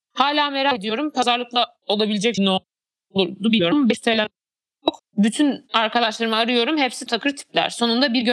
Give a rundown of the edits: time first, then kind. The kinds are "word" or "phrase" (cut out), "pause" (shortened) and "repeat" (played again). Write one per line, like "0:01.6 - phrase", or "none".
0:02.4 - phrase
0:05.0 - pause
0:07.1 - word